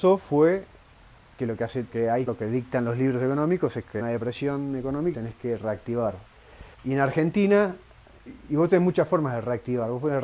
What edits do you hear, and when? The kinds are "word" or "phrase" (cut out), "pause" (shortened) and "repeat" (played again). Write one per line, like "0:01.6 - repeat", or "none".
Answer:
0:01.9 - word
0:02.3 - phrase
0:04.0 - phrase
0:05.1 - word
0:06.7 - pause